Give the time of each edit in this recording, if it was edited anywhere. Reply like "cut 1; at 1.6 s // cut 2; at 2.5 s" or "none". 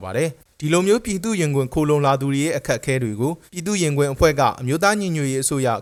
cut 1; at 3.5 s